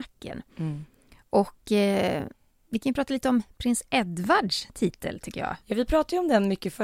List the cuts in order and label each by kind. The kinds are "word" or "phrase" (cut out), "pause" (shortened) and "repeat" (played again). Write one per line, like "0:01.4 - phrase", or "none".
none